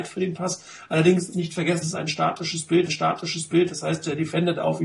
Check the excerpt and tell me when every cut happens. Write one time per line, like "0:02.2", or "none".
0:01.3
0:01.8
0:02.9